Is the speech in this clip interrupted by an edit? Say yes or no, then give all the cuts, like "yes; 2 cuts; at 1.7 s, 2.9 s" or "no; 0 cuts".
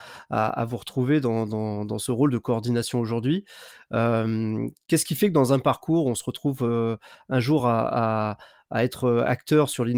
no; 0 cuts